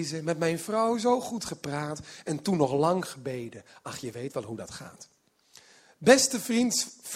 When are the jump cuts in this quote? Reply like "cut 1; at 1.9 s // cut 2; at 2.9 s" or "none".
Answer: none